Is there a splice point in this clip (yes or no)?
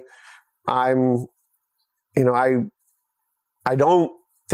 no